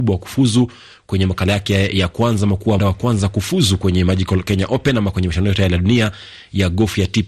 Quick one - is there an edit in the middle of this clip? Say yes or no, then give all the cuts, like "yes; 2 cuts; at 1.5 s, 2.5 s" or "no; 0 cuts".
yes; 1 cut; at 2.8 s